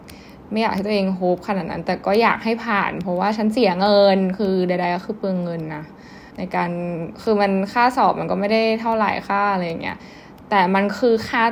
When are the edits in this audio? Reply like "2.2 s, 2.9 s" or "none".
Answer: 6.3 s